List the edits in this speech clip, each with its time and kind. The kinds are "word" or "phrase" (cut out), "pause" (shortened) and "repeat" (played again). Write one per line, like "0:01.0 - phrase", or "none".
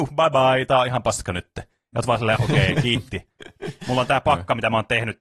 0:02.4 - word